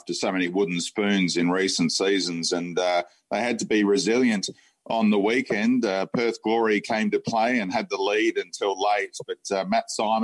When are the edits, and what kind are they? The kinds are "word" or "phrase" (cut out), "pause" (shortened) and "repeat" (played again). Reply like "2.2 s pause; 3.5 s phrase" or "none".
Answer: none